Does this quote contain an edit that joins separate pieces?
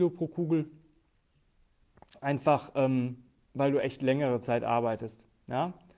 no; 0 cuts

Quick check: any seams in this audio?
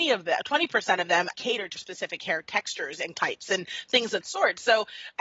yes; 4 cuts; at 1.3 s, 1.8 s, 3.1 s, 4.2 s

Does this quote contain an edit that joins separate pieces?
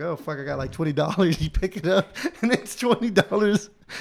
no; 0 cuts

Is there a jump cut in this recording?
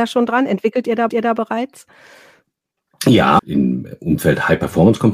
yes; 2 cuts; at 1.1 s, 3.4 s

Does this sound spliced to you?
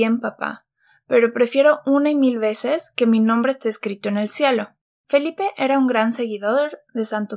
yes; 1 cut; at 4.9 s

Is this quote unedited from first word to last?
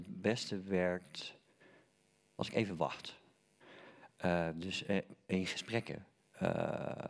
yes; 0 cuts

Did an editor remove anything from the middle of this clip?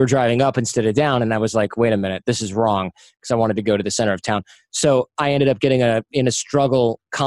no; 0 cuts

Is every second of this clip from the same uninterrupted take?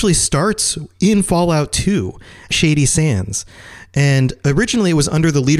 no; 1 cut; at 2.5 s

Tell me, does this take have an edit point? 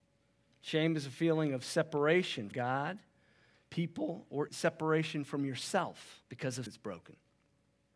yes; 4 cuts; at 2.5 s, 4.5 s, 6.2 s, 6.7 s

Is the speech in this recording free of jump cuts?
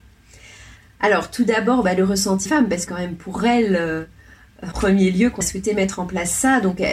no; 4 cuts; at 2.5 s, 2.9 s, 4.7 s, 5.4 s

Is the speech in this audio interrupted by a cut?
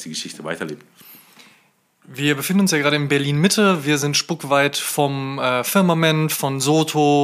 no; 0 cuts

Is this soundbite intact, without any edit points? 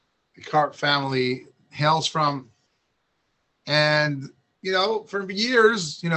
yes; 0 cuts

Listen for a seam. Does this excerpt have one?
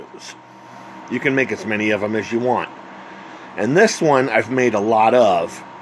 no; 0 cuts

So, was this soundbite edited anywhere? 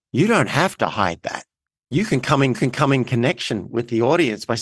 yes; 1 cut; at 2.5 s

